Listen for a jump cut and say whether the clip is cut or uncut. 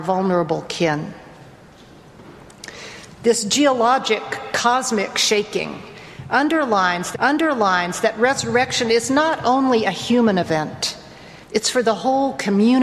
cut